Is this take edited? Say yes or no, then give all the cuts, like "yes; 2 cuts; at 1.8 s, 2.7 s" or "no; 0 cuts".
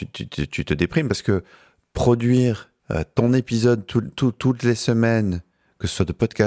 yes; 1 cut; at 2.8 s